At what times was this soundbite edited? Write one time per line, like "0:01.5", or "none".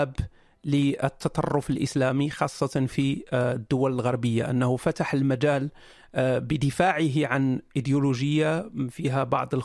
none